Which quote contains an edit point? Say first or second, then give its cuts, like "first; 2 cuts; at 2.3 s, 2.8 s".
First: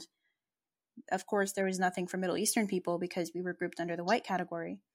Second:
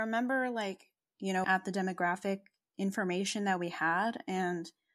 second; 1 cut; at 1.4 s